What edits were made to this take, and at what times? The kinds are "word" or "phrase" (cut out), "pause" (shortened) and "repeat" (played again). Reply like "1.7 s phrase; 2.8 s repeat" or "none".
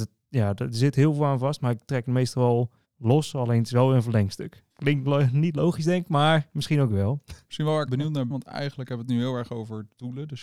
2.8 s pause; 4.7 s pause; 7.9 s word; 8.3 s word